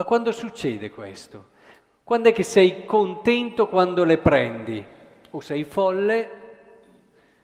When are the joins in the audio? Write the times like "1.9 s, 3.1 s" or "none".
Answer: none

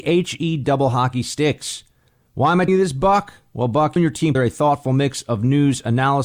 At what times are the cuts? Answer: 2.7 s, 4.0 s, 4.3 s

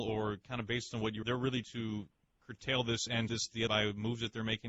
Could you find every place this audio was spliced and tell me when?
1.2 s, 1.6 s, 3.3 s, 3.7 s

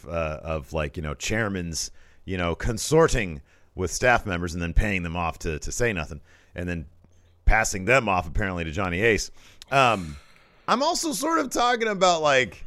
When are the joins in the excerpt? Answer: none

